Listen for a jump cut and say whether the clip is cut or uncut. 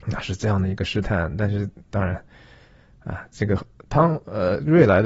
uncut